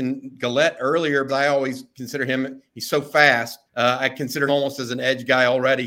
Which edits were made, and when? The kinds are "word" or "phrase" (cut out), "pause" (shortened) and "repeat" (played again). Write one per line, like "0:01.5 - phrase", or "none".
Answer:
0:01.3 - word
0:03.7 - pause
0:04.5 - word